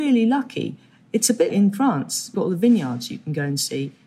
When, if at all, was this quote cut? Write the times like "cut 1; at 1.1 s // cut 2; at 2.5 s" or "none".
cut 1; at 1.5 s // cut 2; at 2.3 s